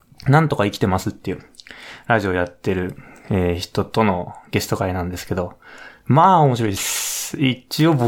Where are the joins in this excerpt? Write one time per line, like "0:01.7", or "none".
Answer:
none